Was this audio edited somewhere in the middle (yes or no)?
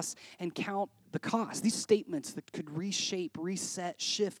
yes